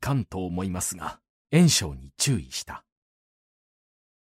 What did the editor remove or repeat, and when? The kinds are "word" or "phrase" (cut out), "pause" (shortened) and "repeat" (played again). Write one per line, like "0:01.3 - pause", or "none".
0:01.4 - word